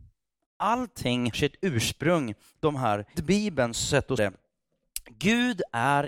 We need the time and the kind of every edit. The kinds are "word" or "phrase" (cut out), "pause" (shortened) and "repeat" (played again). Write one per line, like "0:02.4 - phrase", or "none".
0:01.3 - word
0:02.6 - word
0:03.1 - word
0:04.2 - word